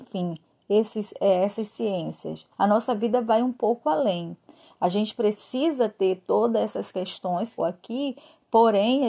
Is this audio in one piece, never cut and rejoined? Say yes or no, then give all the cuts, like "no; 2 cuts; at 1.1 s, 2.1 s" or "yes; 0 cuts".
no; 2 cuts; at 2.5 s, 7.6 s